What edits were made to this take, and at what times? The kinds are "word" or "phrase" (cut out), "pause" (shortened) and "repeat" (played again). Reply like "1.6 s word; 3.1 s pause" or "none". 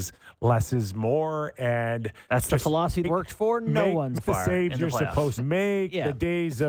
3.0 s word; 4.2 s word; 5.4 s word